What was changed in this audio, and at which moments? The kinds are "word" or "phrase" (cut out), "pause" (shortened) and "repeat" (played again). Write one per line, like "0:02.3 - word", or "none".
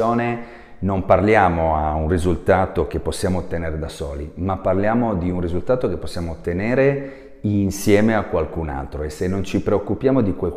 none